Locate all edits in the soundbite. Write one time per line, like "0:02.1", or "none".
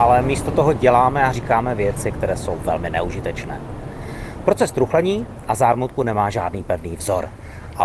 none